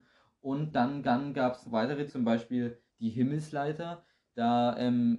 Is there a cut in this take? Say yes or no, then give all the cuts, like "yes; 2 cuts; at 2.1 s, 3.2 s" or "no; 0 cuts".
yes; 4 cuts; at 1.0 s, 1.6 s, 2.1 s, 2.9 s